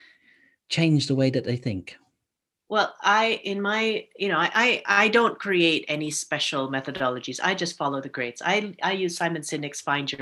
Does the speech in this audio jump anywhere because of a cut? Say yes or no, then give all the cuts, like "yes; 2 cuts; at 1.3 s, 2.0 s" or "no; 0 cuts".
no; 0 cuts